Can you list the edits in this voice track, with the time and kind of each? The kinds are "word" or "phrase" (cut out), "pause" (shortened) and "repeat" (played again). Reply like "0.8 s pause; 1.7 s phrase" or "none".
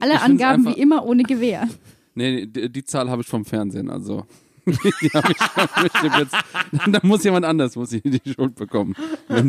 none